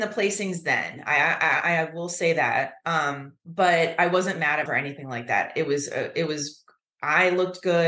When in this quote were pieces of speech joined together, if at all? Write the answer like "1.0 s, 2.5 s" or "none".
3.4 s, 4.7 s